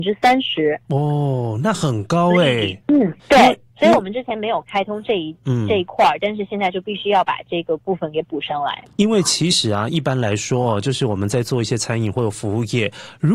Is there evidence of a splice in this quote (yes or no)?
yes